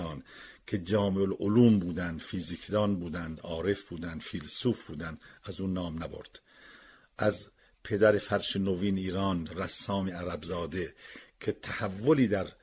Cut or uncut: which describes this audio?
uncut